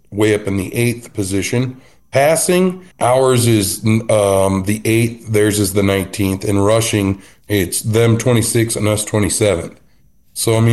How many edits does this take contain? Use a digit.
1